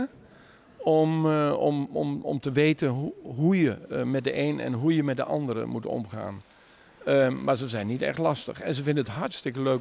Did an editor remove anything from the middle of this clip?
no; 0 cuts

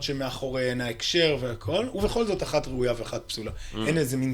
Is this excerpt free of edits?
yes; 0 cuts

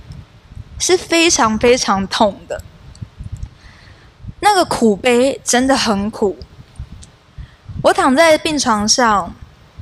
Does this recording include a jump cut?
no; 0 cuts

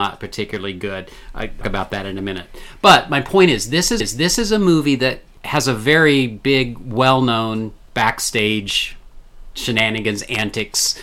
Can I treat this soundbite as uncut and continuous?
no; 2 cuts; at 1.6 s, 4.0 s

